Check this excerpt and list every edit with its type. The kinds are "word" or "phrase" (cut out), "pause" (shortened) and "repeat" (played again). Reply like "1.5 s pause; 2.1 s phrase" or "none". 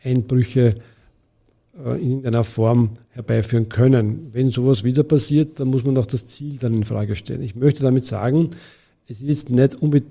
none